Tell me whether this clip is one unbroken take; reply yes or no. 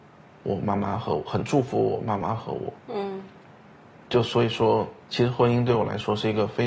no